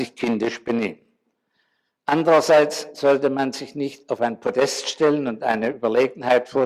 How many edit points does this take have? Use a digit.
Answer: 0